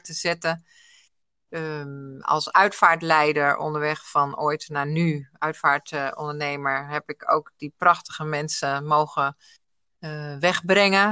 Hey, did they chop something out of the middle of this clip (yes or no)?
no